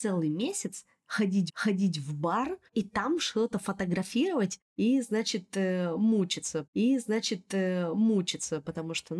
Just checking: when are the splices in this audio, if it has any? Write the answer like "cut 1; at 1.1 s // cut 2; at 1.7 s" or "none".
cut 1; at 1.5 s // cut 2; at 2.7 s // cut 3; at 6.6 s